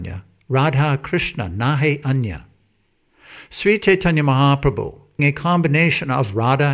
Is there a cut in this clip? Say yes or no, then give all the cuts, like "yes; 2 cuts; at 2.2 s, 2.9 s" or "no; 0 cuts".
yes; 1 cut; at 5.2 s